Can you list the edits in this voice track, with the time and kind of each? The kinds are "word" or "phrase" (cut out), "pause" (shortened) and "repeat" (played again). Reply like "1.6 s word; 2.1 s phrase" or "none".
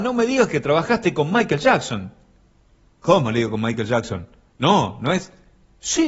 none